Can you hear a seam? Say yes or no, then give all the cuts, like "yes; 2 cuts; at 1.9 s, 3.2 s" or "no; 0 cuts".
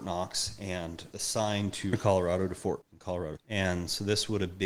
yes; 4 cuts; at 1.1 s, 1.9 s, 2.8 s, 3.4 s